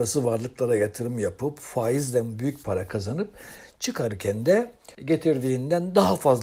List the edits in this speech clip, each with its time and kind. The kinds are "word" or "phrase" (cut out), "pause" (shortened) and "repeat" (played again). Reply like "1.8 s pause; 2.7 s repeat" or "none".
4.9 s pause